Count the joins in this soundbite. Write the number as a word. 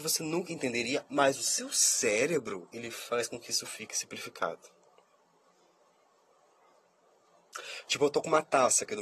zero